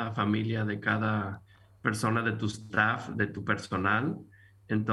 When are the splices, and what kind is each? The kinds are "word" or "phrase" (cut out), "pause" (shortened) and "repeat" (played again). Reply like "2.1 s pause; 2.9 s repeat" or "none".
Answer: none